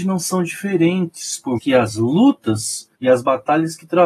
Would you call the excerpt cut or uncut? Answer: cut